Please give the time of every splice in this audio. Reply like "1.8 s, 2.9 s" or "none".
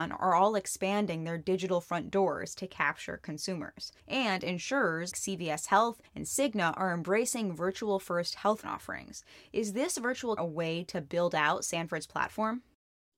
4.0 s, 5.1 s, 6.1 s, 8.6 s, 10.4 s